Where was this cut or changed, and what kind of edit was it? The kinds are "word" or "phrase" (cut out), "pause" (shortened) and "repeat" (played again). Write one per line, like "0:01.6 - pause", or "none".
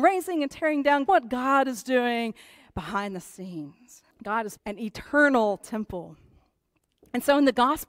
0:01.1 - word
0:04.1 - pause
0:04.6 - word